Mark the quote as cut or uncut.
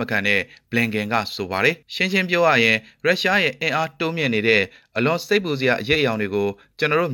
uncut